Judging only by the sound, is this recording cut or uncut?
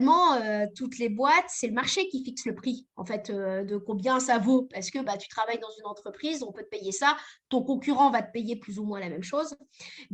uncut